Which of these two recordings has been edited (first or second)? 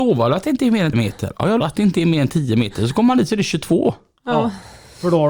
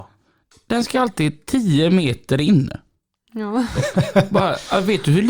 first